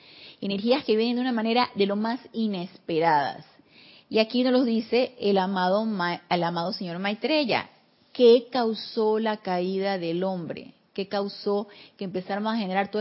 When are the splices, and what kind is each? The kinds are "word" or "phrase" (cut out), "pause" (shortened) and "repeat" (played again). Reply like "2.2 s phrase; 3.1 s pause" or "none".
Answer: none